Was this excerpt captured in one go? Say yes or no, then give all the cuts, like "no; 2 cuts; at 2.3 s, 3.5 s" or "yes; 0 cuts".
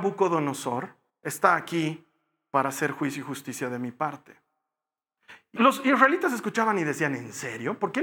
no; 2 cuts; at 1.1 s, 5.6 s